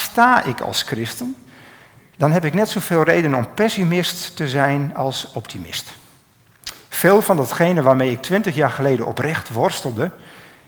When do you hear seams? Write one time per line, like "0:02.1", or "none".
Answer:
none